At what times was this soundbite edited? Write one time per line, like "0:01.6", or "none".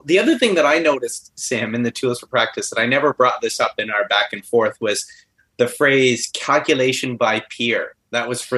none